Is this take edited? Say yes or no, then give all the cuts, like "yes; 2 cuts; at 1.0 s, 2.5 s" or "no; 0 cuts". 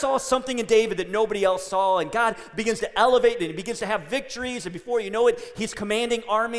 yes; 1 cut; at 3.4 s